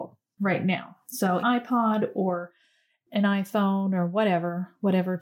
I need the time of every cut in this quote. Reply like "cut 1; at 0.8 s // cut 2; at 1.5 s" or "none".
cut 1; at 1.4 s